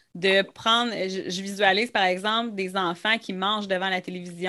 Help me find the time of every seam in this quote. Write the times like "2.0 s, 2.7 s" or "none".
none